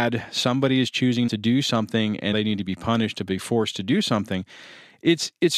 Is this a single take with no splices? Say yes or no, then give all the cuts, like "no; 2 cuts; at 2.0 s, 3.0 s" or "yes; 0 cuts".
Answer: no; 2 cuts; at 1.3 s, 2.3 s